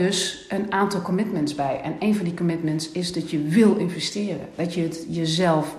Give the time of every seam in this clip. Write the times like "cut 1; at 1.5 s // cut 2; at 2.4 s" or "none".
none